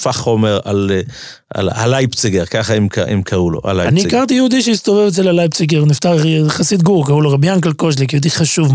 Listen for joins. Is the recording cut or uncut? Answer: uncut